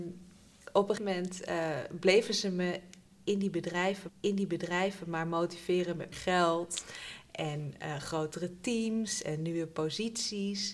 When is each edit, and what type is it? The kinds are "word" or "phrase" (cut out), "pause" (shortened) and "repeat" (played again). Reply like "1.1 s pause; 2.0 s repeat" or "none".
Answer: 1.0 s word; 4.1 s repeat; 6.1 s word